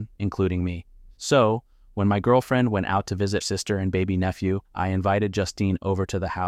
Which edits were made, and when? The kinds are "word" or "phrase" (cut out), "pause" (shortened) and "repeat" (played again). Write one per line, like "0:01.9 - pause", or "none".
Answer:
0:01.2 - pause
0:03.4 - word
0:04.6 - pause